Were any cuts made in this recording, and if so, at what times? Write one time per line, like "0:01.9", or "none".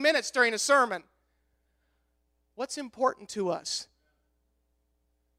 none